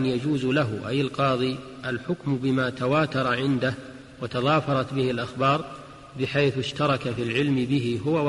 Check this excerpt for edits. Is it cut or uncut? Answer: uncut